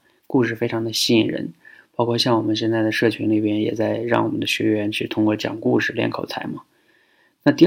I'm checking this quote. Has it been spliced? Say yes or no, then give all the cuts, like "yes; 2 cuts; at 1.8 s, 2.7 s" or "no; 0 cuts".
no; 0 cuts